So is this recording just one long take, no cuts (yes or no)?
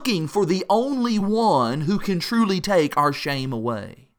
yes